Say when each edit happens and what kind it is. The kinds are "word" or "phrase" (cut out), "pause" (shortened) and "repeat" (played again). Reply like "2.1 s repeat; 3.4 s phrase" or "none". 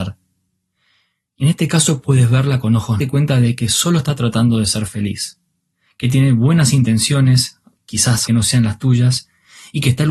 3.0 s phrase; 8.3 s word